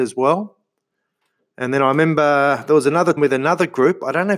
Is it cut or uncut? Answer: cut